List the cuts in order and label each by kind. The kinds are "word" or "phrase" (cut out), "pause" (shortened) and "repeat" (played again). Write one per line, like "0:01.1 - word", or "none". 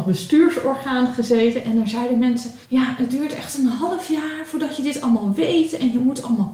0:02.6 - pause